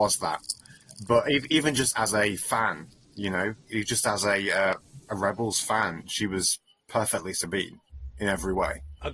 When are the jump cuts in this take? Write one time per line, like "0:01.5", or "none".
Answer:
none